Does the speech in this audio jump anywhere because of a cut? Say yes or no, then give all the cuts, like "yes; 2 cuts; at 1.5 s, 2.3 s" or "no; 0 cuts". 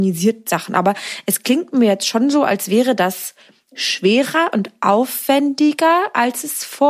no; 0 cuts